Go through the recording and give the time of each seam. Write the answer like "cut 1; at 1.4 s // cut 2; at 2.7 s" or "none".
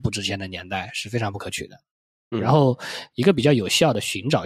none

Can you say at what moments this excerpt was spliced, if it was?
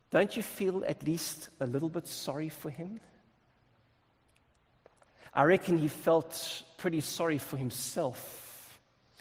none

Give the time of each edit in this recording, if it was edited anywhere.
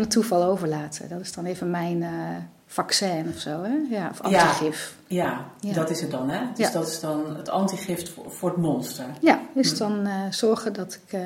none

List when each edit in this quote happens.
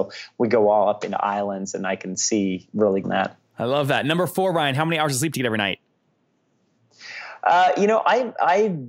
cut 1; at 3.0 s

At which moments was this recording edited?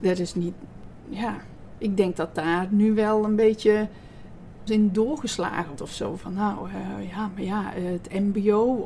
cut 1; at 4.7 s // cut 2; at 5.8 s

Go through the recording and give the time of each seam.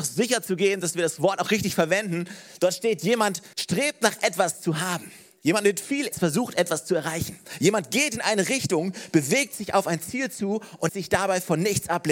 cut 1; at 3.5 s // cut 2; at 6.1 s // cut 3; at 10.9 s

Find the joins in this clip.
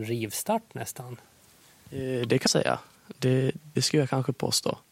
cut 1; at 2.5 s // cut 2; at 3.8 s

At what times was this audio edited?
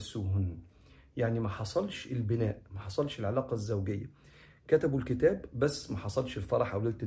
none

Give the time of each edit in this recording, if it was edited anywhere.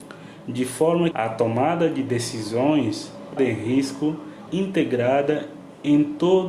cut 1; at 1.1 s // cut 2; at 3.4 s // cut 3; at 4.5 s

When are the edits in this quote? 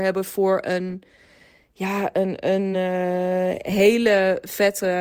none

